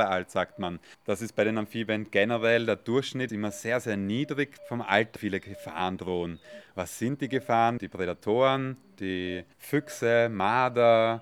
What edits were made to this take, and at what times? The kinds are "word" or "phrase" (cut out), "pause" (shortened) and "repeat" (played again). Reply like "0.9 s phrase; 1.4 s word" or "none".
0.9 s pause; 3.3 s word; 4.6 s word; 5.2 s phrase; 9.5 s pause